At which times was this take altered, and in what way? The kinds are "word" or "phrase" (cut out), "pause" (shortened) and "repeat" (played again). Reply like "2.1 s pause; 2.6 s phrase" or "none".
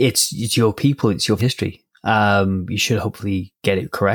1.4 s word